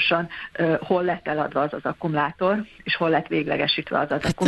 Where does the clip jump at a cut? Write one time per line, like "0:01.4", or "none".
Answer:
none